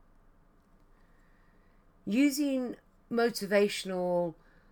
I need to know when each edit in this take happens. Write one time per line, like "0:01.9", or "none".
0:03.0